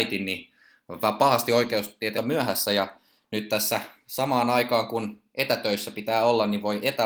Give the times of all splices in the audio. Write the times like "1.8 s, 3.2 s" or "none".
2.1 s